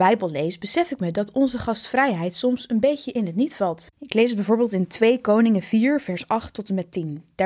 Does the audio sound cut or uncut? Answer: cut